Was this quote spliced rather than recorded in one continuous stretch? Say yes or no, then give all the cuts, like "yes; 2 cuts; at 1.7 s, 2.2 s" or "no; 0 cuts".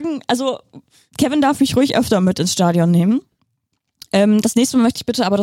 no; 0 cuts